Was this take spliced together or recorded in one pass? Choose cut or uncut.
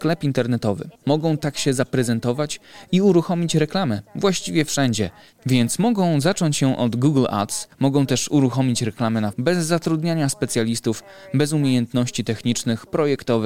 cut